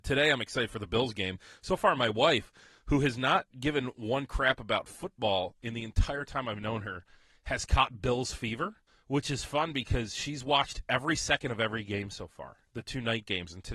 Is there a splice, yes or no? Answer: yes